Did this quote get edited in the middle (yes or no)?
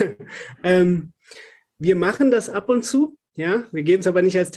no